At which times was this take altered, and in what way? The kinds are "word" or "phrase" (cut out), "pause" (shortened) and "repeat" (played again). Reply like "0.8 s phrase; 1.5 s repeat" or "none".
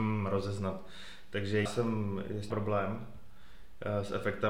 1.7 s word; 2.5 s word

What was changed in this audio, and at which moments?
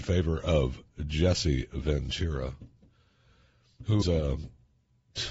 4.0 s word

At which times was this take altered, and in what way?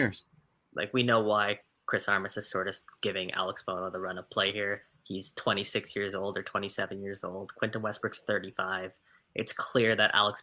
none

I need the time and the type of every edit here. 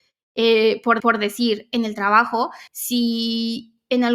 1.0 s repeat; 2.7 s pause

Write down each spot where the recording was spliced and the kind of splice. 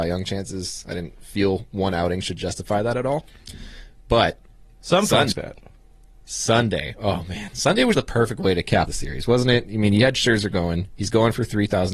5.3 s word; 7.9 s word; 8.9 s word

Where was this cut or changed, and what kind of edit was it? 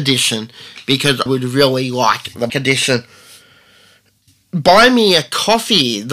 1.3 s word; 2.5 s word

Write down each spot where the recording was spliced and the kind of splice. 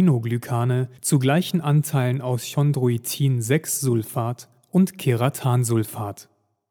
1.0 s pause

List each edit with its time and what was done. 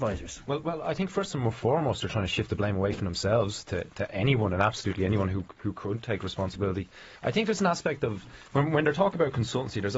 7.2 s pause; 8.4 s pause

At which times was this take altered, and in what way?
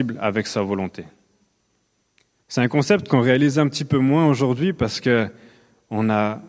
none

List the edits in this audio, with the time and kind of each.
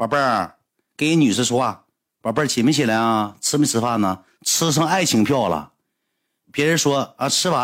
6.4 s word

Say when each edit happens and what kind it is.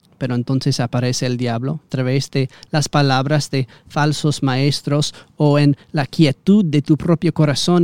1.9 s word

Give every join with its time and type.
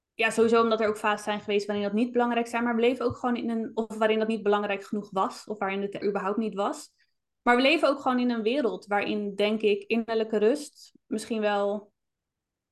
6.0 s word

